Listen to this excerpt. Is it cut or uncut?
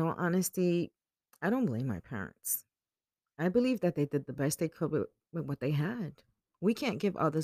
uncut